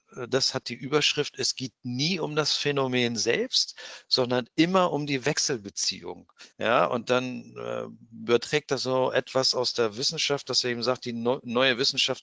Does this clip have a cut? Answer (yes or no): yes